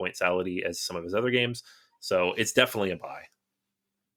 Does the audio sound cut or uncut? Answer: uncut